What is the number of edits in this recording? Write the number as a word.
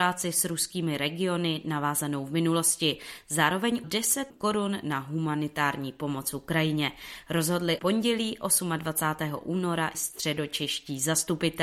four